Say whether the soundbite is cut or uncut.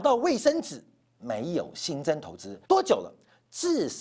cut